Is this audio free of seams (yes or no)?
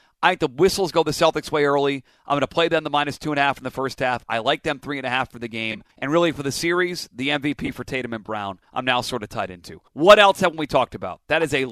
no